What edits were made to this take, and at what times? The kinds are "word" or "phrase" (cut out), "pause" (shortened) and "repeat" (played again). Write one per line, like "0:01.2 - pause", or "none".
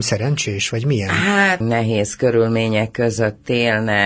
0:01.6 - phrase

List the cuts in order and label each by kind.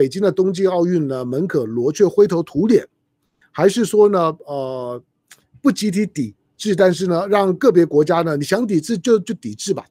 none

